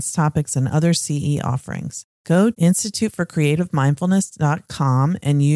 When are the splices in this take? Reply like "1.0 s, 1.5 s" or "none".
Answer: 2.5 s